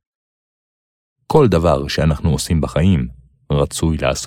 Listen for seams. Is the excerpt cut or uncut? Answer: uncut